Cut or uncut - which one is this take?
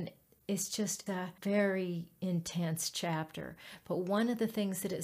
cut